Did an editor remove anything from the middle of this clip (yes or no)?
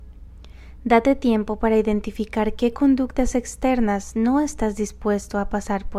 no